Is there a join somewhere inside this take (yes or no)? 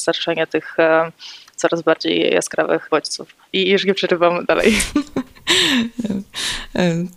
no